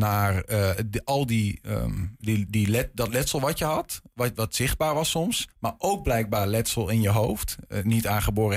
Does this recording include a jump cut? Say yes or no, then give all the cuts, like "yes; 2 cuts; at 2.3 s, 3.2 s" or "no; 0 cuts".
yes; 1 cut; at 5.5 s